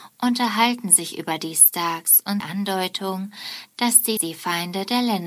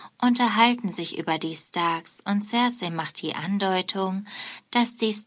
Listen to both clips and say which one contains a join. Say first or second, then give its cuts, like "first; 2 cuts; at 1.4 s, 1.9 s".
first; 2 cuts; at 2.4 s, 4.2 s